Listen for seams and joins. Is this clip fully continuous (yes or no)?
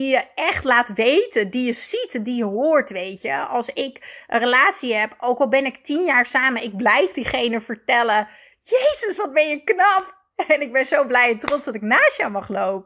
yes